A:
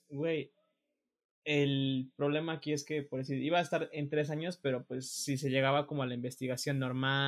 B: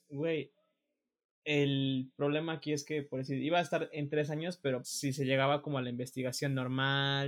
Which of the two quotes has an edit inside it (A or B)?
B